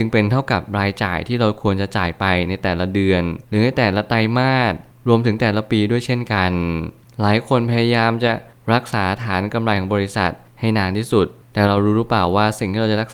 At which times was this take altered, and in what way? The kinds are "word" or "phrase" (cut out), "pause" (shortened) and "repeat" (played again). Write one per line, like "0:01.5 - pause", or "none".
0:03.4 - pause